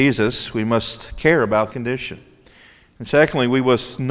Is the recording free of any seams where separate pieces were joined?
no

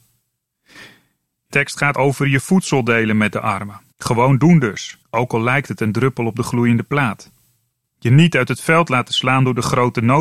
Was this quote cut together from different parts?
yes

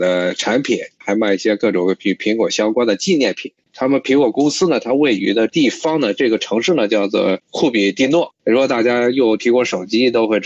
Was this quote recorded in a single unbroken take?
no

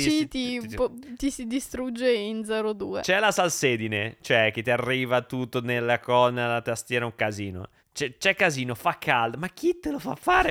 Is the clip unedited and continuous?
no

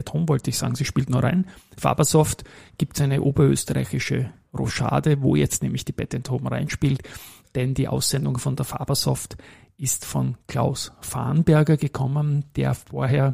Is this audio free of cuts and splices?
yes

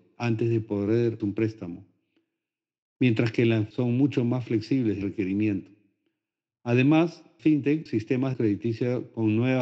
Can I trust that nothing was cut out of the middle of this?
no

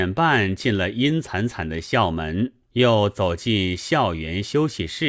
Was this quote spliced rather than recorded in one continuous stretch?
yes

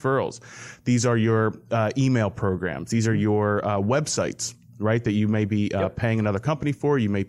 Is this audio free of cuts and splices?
yes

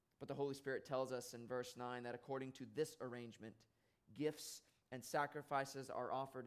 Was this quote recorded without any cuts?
yes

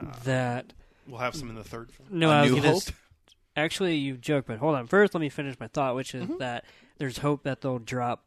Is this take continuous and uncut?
yes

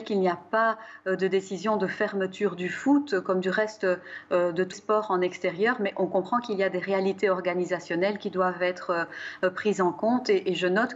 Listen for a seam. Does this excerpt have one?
yes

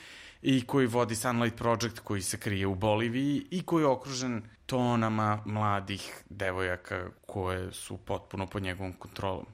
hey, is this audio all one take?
no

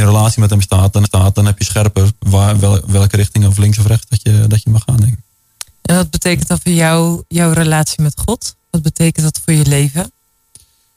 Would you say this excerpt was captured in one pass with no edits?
no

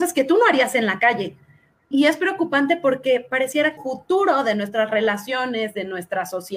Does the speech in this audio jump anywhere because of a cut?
yes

